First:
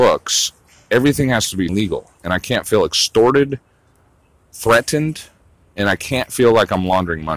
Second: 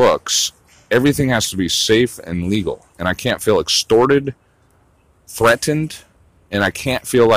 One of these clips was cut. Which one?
first; 1 cut; at 1.7 s

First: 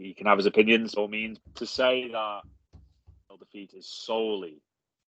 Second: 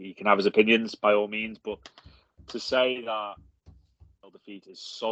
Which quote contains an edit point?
first; 2 cuts; at 1.0 s, 1.4 s

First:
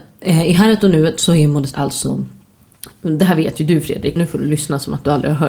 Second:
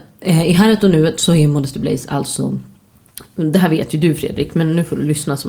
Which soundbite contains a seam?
first; 2 cuts; at 1.7 s, 4.2 s

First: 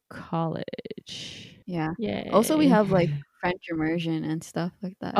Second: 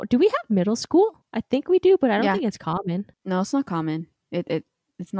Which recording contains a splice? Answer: first; 1 cut; at 1.6 s

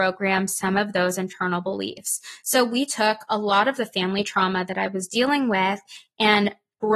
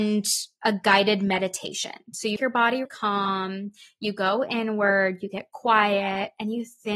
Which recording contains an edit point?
second; 2 cuts; at 2.4 s, 2.8 s

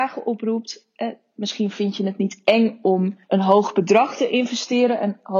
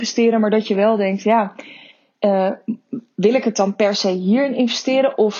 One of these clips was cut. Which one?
first; 1 cut; at 3.2 s

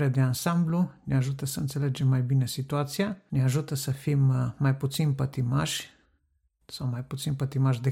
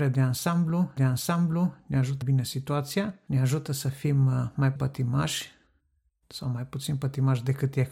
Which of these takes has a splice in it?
second; 3 cuts; at 1.0 s, 2.2 s, 4.8 s

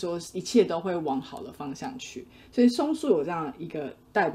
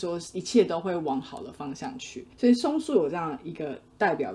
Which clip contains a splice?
second; 1 cut; at 2.3 s

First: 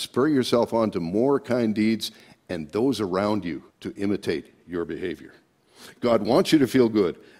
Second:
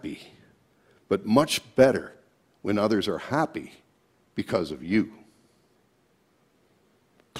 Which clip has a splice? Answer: first; 1 cut; at 3.7 s

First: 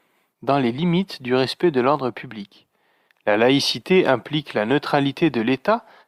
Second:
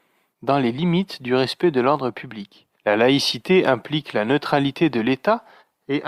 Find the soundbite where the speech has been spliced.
second; 1 cut; at 2.8 s

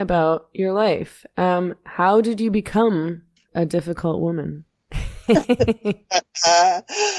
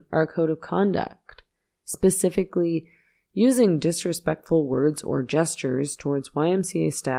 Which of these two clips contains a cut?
first; 1 cut; at 3.5 s

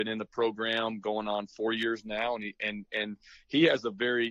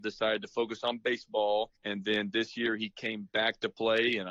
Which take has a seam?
second; 1 cut; at 1.8 s

